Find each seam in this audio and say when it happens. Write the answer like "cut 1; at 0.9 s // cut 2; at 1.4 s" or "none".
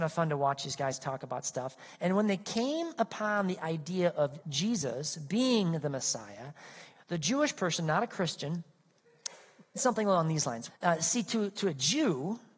cut 1; at 4.4 s // cut 2; at 9.8 s // cut 3; at 10.7 s